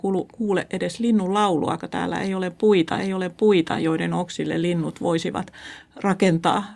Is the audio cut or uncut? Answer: cut